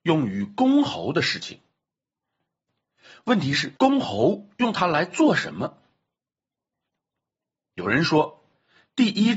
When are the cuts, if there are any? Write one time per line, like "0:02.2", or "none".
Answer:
0:03.8